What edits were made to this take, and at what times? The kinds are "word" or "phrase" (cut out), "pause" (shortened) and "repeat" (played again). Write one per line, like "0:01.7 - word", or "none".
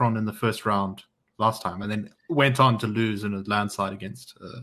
none

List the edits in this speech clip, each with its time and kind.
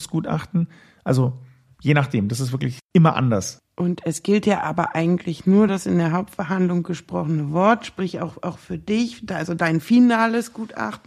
none

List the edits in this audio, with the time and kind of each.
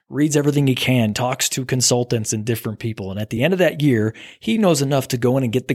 none

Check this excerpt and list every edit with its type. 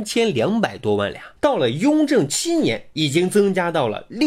0:01.4 - pause

